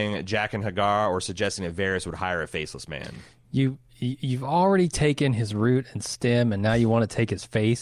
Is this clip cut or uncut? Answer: uncut